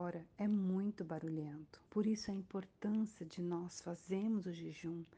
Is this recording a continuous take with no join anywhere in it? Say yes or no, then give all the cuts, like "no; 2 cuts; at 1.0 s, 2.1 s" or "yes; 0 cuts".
no; 1 cut; at 1.9 s